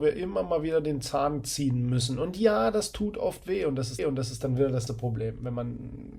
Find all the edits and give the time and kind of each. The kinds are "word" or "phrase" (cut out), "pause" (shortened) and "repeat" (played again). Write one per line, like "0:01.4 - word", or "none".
0:04.0 - repeat
0:04.9 - word